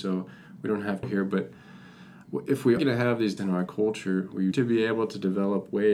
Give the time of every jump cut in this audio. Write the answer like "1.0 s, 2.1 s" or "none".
1.0 s, 2.8 s, 3.4 s, 4.5 s